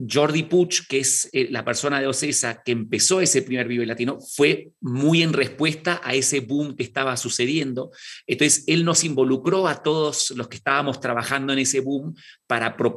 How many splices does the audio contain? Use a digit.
0